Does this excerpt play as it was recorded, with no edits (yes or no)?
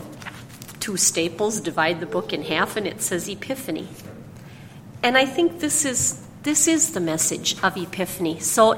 yes